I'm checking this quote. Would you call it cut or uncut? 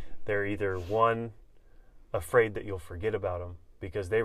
uncut